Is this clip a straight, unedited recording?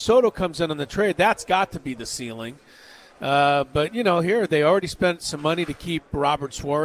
yes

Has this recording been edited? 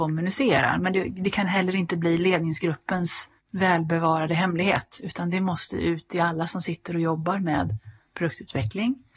no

